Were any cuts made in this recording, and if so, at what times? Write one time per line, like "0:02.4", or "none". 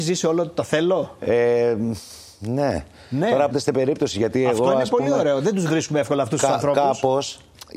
0:03.5